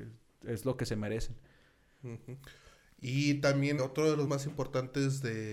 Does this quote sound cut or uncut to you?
cut